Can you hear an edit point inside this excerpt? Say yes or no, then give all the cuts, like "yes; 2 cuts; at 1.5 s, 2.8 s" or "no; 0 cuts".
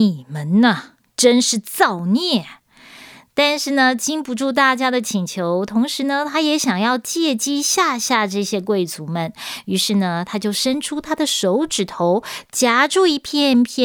no; 0 cuts